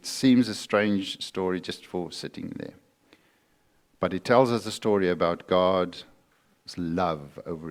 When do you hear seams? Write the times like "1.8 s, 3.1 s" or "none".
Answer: none